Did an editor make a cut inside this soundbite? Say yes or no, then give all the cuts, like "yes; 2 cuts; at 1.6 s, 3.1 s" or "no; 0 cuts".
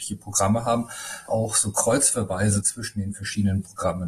yes; 1 cut; at 1.3 s